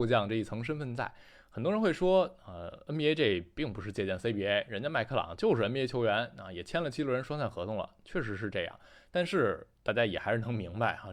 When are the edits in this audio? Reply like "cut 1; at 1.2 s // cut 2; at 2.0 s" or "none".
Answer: none